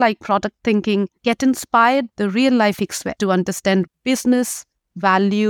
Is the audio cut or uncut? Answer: cut